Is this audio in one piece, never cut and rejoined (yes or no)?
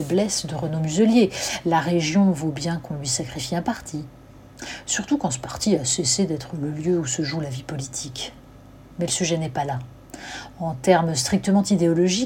yes